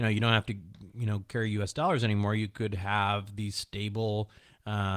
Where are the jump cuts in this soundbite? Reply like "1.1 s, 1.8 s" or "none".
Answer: none